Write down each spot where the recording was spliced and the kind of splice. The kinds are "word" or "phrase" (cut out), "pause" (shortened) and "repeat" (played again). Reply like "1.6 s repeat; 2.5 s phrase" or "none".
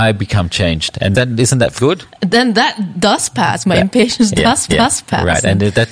1.1 s word; 1.8 s word; 4.7 s repeat

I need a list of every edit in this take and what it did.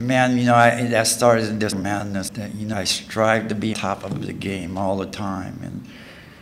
1.7 s word; 2.3 s word; 2.7 s word; 3.7 s word

